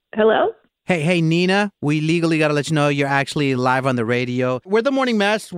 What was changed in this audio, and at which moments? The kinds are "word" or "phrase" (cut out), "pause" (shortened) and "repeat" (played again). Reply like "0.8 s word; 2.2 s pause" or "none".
none

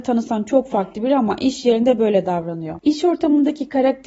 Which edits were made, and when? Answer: 2.8 s pause

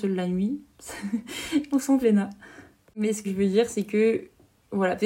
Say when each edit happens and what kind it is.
2.0 s word; 3.2 s word

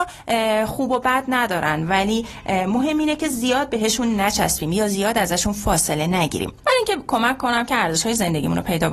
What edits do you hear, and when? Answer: none

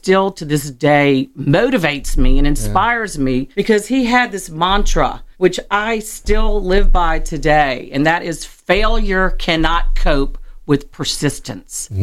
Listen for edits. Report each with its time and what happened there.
3.5 s pause; 5.3 s pause

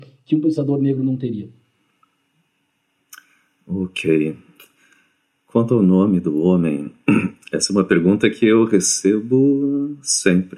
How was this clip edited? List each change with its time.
none

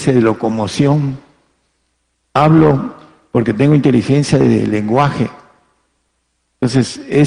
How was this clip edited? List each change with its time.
none

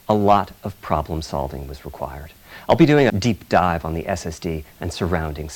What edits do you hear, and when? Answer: 3.1 s word

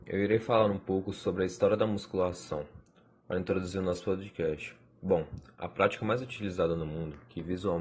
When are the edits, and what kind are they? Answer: none

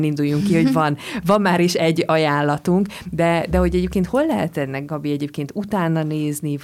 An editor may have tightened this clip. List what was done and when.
none

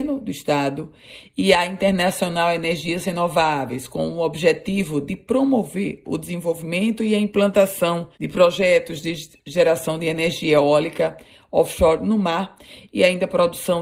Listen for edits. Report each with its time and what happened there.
8.1 s pause

